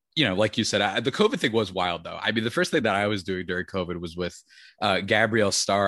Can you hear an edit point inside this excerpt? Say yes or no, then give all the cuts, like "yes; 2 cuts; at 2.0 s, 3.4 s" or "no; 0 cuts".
no; 0 cuts